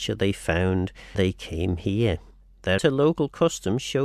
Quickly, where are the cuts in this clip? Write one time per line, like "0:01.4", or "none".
0:01.1
0:02.8